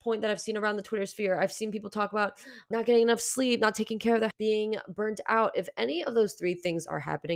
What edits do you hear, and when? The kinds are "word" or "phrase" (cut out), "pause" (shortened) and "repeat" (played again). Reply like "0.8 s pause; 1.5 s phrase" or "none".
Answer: 2.7 s word; 4.3 s word